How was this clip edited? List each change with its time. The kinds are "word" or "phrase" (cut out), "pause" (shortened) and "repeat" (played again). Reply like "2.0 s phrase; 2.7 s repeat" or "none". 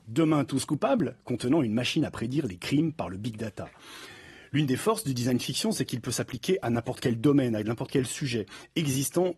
none